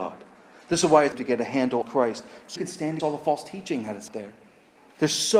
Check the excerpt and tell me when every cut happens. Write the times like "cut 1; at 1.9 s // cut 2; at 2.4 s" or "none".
cut 1; at 1.1 s // cut 2; at 1.8 s // cut 3; at 2.6 s // cut 4; at 3.0 s // cut 5; at 4.1 s